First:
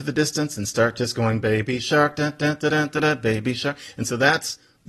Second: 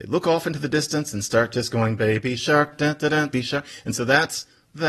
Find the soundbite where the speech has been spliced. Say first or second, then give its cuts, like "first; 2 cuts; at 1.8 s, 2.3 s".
second; 2 cuts; at 2.7 s, 3.3 s